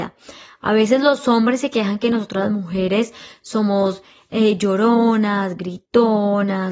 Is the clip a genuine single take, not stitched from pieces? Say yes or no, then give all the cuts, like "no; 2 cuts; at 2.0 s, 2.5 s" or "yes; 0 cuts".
yes; 0 cuts